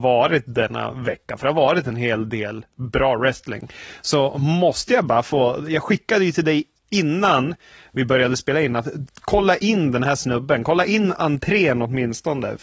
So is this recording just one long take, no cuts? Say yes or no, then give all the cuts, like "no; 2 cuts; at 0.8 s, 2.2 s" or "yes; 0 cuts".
yes; 0 cuts